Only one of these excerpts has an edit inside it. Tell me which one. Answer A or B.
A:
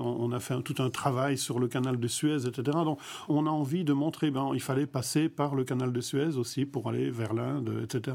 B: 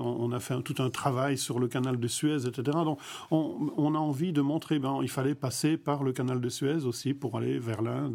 A